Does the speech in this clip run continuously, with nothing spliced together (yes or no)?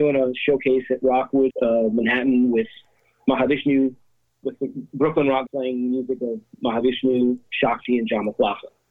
no